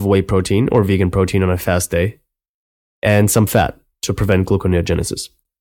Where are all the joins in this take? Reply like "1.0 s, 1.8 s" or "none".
none